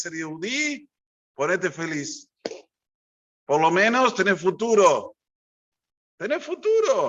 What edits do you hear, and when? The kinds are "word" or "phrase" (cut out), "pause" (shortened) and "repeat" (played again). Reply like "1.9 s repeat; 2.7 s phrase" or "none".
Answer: none